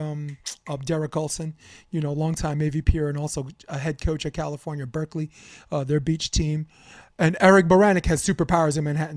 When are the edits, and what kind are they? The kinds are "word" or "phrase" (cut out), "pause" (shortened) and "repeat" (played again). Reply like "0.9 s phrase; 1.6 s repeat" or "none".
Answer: none